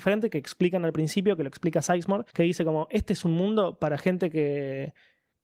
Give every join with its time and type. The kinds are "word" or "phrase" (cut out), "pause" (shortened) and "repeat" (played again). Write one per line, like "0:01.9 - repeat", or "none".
0:02.3 - pause